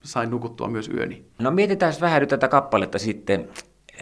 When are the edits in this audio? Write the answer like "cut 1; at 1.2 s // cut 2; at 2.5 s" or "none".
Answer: none

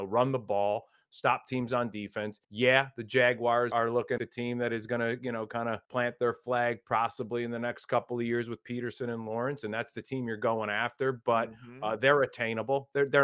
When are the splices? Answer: cut 1; at 2.4 s // cut 2; at 3.7 s // cut 3; at 4.2 s // cut 4; at 5.8 s

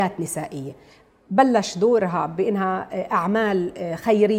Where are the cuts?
none

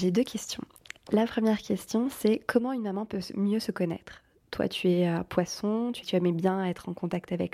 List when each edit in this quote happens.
cut 1; at 6.0 s

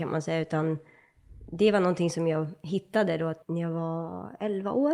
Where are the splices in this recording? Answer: cut 1; at 3.4 s

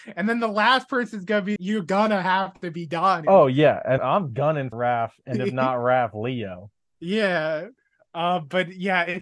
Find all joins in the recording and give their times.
cut 1; at 1.6 s // cut 2; at 4.0 s // cut 3; at 4.7 s

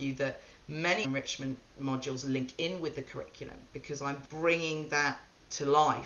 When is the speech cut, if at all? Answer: cut 1; at 1.0 s // cut 2; at 4.2 s

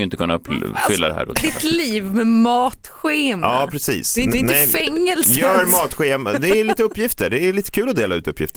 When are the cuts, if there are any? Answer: cut 1; at 4.3 s

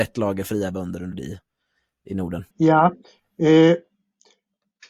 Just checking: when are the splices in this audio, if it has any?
cut 1; at 1.1 s // cut 2; at 2.5 s

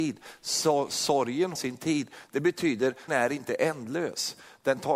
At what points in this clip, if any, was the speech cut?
cut 1; at 1.5 s // cut 2; at 3.1 s

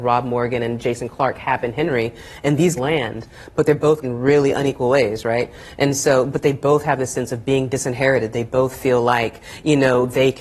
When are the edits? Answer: cut 1; at 2.8 s // cut 2; at 4.0 s

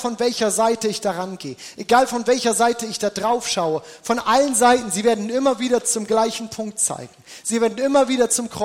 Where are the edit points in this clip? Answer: none

